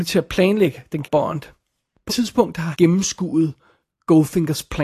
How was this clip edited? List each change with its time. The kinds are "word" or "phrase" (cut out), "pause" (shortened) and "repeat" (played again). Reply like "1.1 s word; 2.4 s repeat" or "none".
1.0 s word; 2.1 s word; 2.7 s word